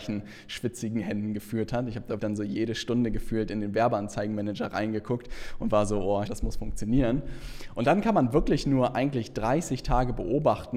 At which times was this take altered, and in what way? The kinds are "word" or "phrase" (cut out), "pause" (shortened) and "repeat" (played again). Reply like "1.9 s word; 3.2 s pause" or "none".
2.2 s word; 6.3 s word

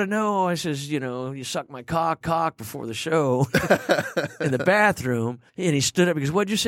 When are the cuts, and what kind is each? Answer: 2.2 s repeat; 5.5 s pause

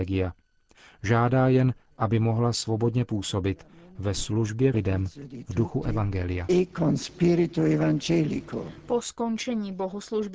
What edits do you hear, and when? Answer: 4.7 s word

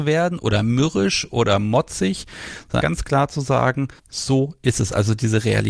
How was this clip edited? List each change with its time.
2.8 s word; 4.0 s pause

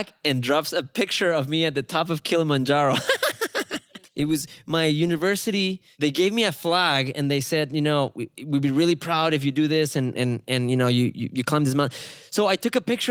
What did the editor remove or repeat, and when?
4.1 s pause

